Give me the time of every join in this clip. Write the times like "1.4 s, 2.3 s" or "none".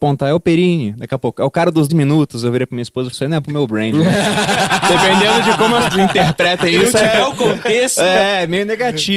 1.9 s, 3.1 s, 3.4 s, 5.9 s

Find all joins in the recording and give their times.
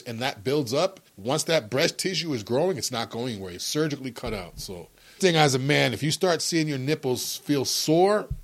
1.1 s, 3.6 s, 5.2 s

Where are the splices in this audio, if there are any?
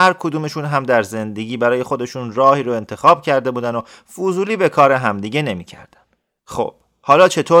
none

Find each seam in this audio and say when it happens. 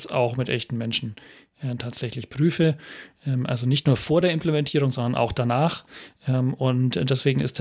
none

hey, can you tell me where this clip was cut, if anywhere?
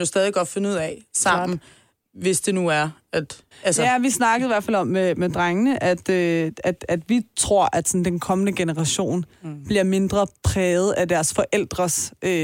3.5 s

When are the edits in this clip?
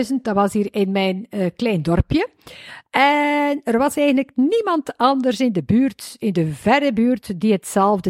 none

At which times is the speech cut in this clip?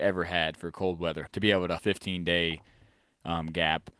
1.3 s, 1.8 s

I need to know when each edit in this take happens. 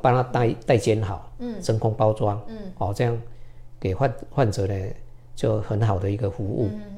none

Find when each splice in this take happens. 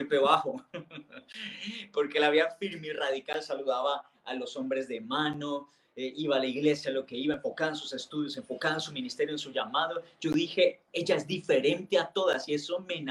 none

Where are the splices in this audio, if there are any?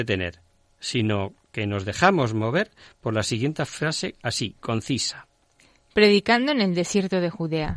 none

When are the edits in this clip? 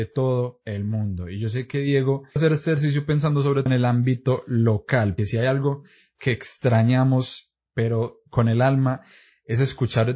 2.4 s, 3.7 s, 5.2 s

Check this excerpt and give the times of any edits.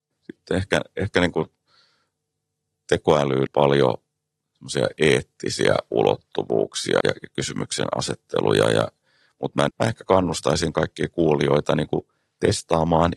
3.5 s, 7.0 s, 9.7 s

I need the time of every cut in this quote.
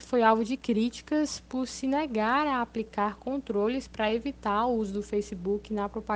none

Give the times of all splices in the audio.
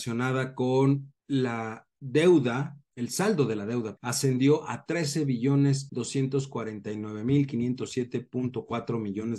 1.2 s, 2.9 s, 4.0 s, 5.9 s

